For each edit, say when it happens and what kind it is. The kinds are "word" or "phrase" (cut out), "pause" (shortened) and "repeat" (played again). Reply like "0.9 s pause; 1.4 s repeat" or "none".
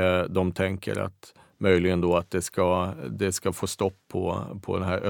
none